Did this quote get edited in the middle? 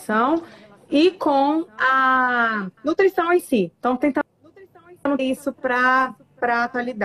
yes; 2 cuts; at 2.8 s, 5.2 s

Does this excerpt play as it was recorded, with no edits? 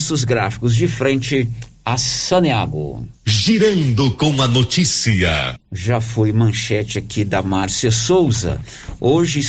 no; 2 cuts; at 3.1 s, 5.6 s

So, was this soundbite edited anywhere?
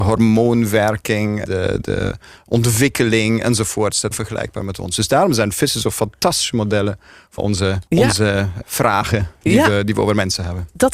yes; 5 cuts; at 1.4 s, 4.1 s, 7.4 s, 7.9 s, 8.6 s

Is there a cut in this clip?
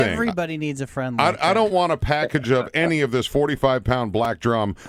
no; 0 cuts

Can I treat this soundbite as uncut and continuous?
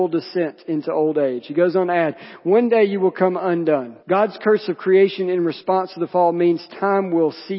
no; 1 cut; at 4.0 s

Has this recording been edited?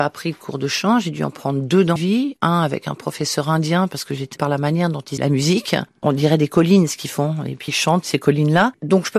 yes; 4 cuts; at 2.0 s, 4.4 s, 5.2 s, 7.7 s

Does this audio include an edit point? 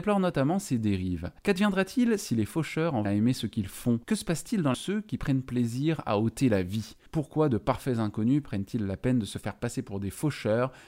yes; 5 cuts; at 1.4 s, 3.1 s, 4.0 s, 4.7 s, 7.1 s

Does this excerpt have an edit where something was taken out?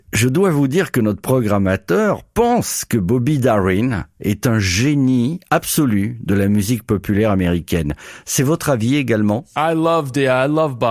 no; 0 cuts

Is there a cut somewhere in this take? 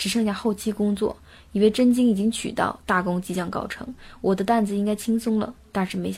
no; 0 cuts

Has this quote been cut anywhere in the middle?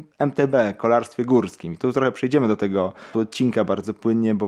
yes; 1 cut; at 3.1 s

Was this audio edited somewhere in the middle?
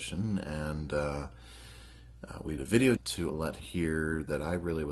yes; 4 cuts; at 2.6 s, 3.0 s, 3.3 s, 3.6 s

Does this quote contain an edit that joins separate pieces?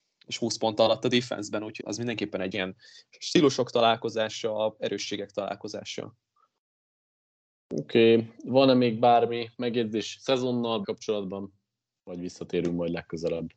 yes; 3 cuts; at 1.8 s, 2.5 s, 10.8 s

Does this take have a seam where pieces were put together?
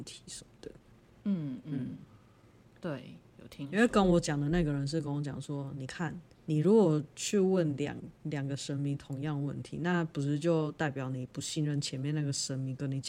no; 0 cuts

